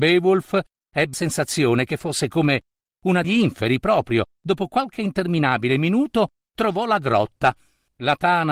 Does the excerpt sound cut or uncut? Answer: cut